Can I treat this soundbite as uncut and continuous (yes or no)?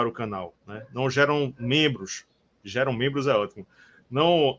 yes